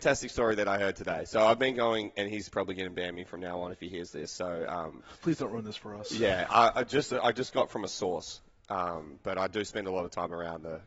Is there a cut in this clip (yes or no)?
yes